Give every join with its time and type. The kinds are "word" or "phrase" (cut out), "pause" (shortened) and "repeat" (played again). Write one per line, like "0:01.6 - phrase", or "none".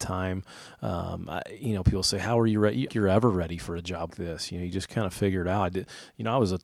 0:02.9 - phrase
0:04.1 - word